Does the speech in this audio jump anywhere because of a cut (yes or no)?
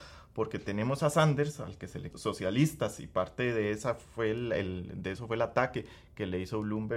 yes